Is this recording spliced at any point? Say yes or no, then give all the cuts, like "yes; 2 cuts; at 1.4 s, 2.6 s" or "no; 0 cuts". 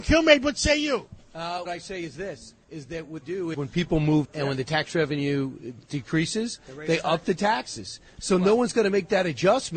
yes; 5 cuts; at 1.7 s, 2.6 s, 3.2 s, 3.5 s, 4.2 s